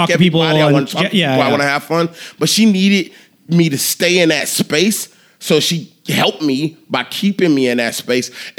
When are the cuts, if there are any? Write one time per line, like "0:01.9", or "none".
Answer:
none